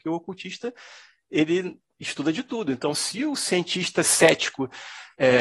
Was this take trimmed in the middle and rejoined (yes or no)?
no